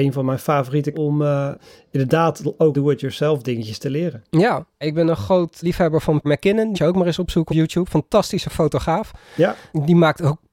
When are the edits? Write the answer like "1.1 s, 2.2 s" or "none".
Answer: 0.9 s, 2.7 s, 4.8 s, 5.6 s, 6.2 s, 6.7 s, 7.5 s